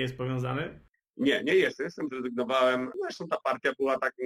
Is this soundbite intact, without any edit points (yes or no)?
no